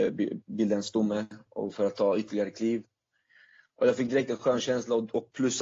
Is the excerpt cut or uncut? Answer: uncut